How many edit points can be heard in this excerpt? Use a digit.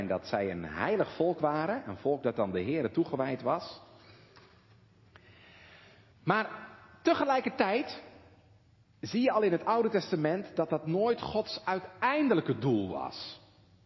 0